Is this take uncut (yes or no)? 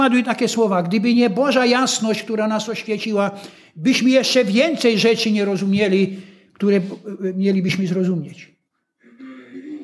yes